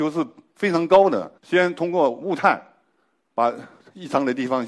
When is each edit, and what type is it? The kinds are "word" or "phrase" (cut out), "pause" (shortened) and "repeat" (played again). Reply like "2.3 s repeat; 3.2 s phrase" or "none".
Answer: 1.4 s pause